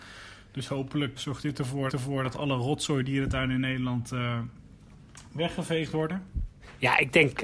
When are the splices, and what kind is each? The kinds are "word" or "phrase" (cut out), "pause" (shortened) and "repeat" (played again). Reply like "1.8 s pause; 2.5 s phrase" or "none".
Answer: 1.2 s word; 1.9 s repeat